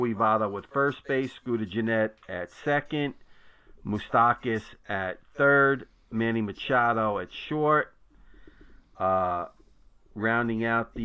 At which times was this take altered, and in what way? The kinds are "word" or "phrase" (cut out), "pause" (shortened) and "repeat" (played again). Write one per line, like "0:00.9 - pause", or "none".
none